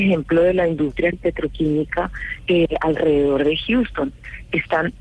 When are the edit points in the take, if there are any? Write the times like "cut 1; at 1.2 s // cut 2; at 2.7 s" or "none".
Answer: cut 1; at 1.1 s